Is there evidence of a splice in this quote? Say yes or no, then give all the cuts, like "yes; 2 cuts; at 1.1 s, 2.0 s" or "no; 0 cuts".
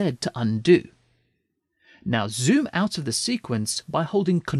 no; 0 cuts